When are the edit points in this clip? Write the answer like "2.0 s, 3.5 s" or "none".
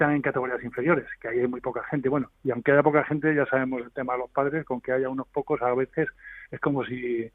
none